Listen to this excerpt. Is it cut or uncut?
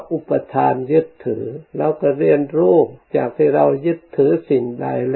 cut